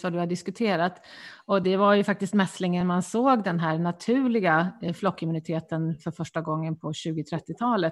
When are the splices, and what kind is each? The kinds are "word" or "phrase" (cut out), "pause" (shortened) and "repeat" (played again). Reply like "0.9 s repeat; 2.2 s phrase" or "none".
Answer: none